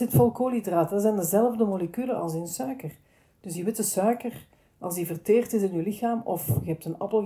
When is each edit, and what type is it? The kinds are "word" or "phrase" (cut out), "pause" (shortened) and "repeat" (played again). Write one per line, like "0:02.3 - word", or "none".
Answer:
none